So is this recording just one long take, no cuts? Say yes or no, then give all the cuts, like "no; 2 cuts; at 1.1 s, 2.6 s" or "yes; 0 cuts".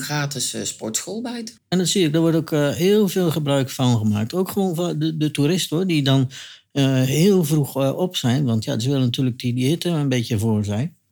no; 1 cut; at 1.6 s